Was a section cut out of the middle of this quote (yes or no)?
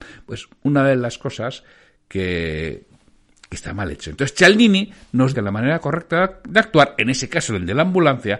yes